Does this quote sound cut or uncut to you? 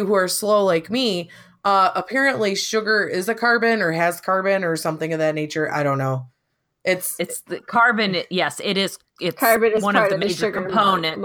uncut